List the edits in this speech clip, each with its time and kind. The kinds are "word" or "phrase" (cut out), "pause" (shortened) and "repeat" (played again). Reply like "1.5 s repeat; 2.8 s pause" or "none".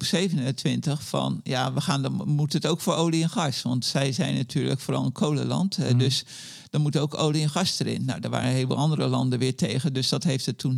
none